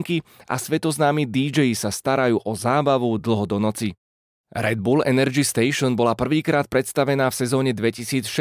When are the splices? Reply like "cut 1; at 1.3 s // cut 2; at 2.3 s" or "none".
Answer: none